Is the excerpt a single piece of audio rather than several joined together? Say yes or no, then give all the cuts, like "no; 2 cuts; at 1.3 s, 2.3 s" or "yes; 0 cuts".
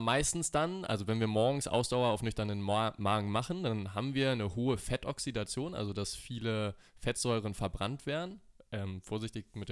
yes; 0 cuts